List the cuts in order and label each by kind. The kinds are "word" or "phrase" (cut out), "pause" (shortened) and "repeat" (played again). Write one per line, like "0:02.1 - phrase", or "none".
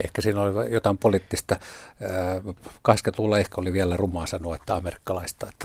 none